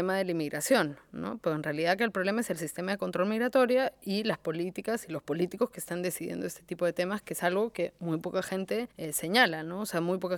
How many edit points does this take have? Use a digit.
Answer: 1